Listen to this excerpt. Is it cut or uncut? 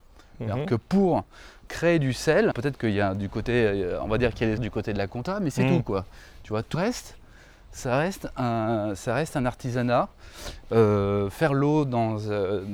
cut